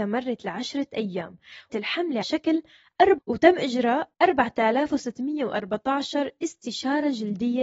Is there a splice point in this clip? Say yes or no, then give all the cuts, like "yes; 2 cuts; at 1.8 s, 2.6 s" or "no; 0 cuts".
yes; 4 cuts; at 1.7 s, 2.2 s, 3.2 s, 4.1 s